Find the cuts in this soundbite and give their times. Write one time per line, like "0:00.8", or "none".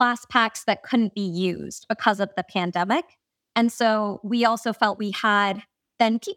0:05.0